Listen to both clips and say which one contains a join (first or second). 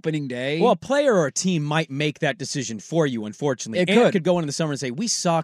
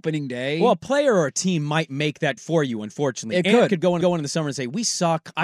second